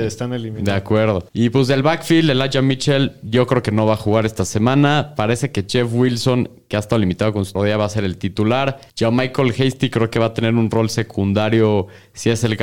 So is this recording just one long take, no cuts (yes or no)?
no